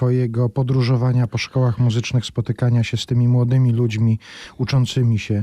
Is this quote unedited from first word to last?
yes; 0 cuts

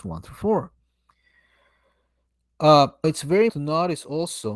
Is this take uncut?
no; 2 cuts; at 3.0 s, 3.5 s

